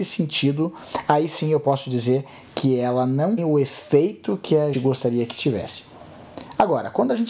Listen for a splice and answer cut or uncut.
cut